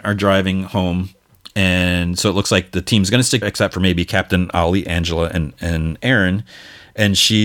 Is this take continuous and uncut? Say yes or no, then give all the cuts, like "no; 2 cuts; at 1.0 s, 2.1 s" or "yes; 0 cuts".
no; 1 cut; at 3.4 s